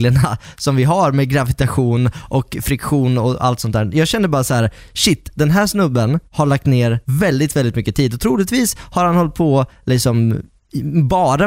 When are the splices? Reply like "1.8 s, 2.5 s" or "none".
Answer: 6.3 s, 7.0 s